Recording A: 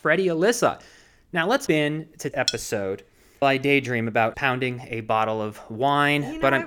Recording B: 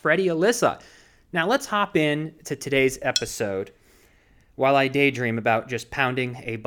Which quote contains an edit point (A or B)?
A